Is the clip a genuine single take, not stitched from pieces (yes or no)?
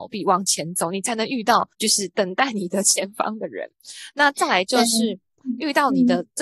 no